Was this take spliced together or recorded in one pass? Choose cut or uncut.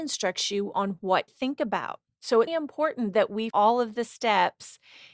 cut